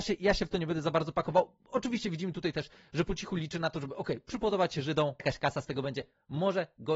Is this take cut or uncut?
cut